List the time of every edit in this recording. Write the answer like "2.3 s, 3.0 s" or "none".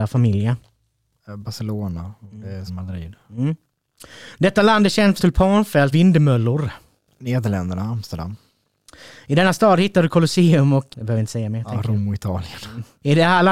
2.7 s, 5.2 s, 5.9 s, 10.9 s